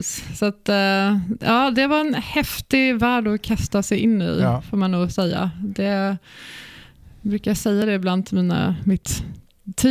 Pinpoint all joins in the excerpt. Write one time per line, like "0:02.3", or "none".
none